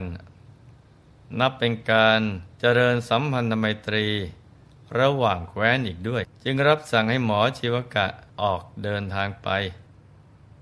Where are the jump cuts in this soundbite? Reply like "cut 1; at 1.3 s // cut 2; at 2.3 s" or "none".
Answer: cut 1; at 2.5 s // cut 2; at 6.3 s // cut 3; at 8.3 s